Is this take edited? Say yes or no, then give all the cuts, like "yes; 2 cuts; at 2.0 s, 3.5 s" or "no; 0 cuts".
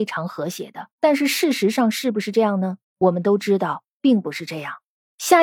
yes; 2 cuts; at 0.9 s, 2.8 s